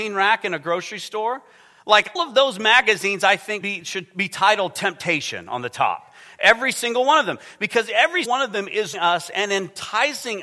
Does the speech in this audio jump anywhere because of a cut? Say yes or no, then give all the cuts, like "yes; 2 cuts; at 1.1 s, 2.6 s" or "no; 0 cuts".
yes; 4 cuts; at 2.2 s, 3.6 s, 8.3 s, 8.9 s